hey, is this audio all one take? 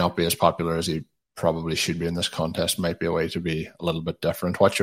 yes; 0 cuts

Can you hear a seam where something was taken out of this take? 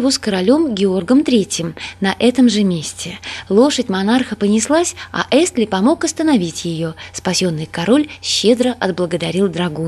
no; 0 cuts

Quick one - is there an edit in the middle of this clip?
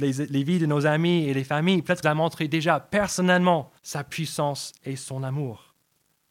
yes; 2 cuts; at 2.0 s, 3.8 s

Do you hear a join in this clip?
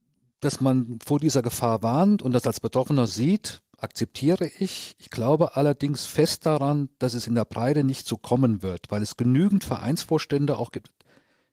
yes; 1 cut; at 3.1 s

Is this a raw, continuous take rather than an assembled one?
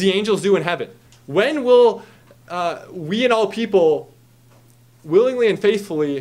yes; 0 cuts

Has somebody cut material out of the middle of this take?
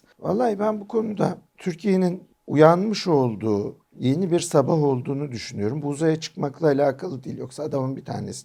no; 0 cuts

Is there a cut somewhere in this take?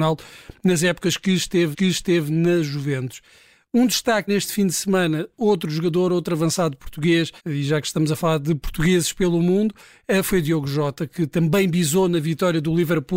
yes; 3 cuts; at 1.7 s, 4.3 s, 7.4 s

